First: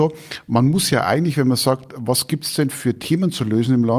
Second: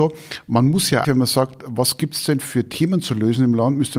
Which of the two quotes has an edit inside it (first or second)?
second